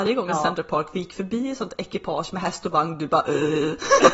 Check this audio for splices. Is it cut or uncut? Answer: uncut